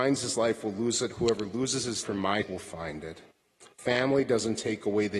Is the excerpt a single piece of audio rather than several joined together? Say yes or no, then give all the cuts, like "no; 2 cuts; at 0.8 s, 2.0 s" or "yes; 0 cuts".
no; 2 cuts; at 2.0 s, 2.4 s